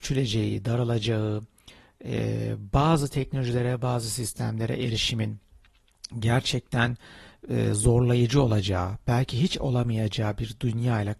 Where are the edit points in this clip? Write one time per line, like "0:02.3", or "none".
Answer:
none

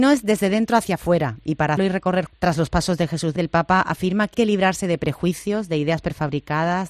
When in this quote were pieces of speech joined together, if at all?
0:01.8
0:02.3
0:03.4
0:04.3

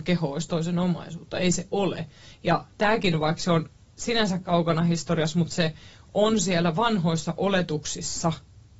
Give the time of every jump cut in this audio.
none

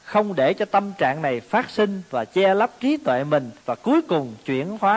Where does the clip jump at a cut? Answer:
0:03.6

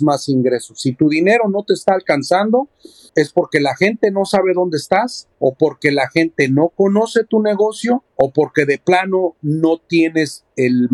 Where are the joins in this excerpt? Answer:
none

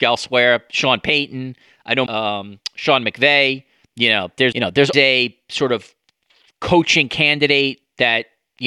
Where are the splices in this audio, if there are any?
0:02.1
0:03.8
0:04.5
0:04.9

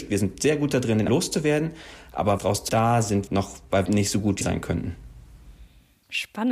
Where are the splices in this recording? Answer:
0:01.1
0:02.4
0:02.7
0:03.3
0:03.8
0:04.4

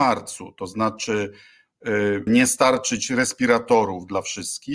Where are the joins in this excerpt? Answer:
0:02.3

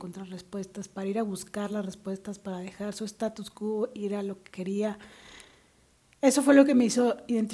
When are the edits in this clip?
none

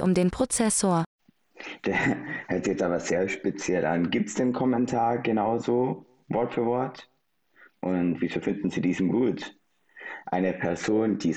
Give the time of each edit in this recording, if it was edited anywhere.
none

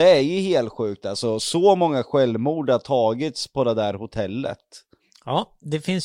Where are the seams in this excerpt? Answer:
none

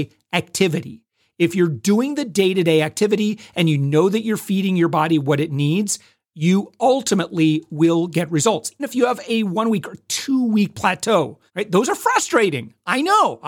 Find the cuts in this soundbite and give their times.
0:08.8
0:11.5

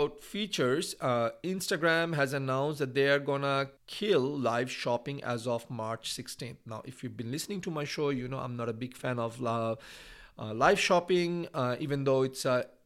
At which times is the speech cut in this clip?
0:03.8

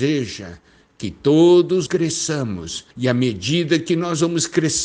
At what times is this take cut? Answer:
0:01.9
0:02.9

